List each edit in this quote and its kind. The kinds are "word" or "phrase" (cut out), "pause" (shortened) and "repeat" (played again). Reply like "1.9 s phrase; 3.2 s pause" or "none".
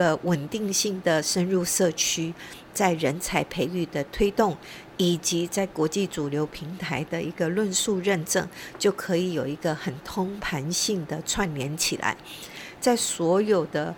none